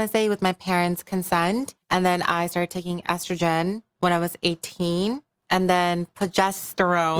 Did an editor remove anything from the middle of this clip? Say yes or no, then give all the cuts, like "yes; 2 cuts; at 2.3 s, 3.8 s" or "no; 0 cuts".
yes; 1 cut; at 1.8 s